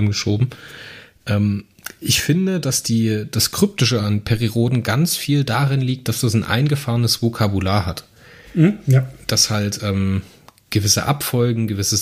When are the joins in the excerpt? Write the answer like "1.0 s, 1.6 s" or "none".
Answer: none